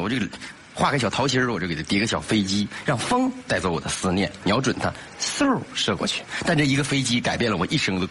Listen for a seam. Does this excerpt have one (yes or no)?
no